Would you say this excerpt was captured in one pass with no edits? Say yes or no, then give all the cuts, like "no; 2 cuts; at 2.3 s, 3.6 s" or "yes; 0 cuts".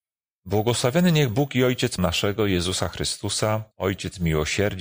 no; 3 cuts; at 1.3 s, 2.0 s, 3.7 s